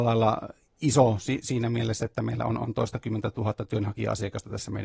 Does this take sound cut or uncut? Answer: uncut